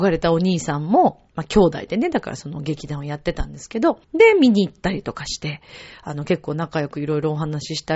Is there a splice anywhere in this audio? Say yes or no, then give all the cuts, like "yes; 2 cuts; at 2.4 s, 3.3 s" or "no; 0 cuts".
yes; 2 cuts; at 1.3 s, 4.0 s